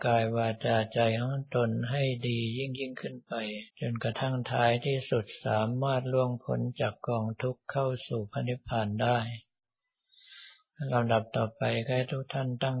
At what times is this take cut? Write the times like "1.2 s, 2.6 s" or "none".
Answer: 3.7 s